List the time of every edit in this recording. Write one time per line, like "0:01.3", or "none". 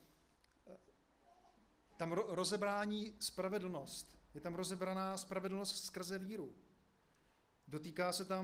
none